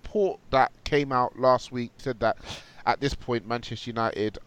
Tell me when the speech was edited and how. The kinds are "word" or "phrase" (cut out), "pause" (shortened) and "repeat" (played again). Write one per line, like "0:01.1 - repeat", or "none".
0:02.0 - word